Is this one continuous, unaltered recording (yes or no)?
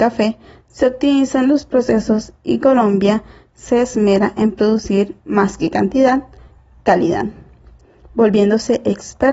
yes